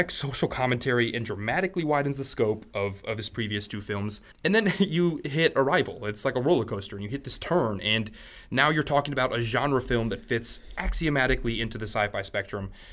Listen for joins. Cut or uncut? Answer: cut